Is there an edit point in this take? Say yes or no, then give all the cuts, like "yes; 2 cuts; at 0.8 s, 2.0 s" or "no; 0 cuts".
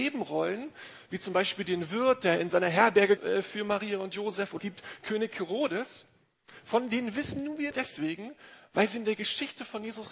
yes; 3 cuts; at 3.2 s, 4.6 s, 7.7 s